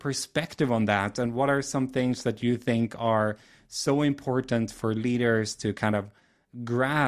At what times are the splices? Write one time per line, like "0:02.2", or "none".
none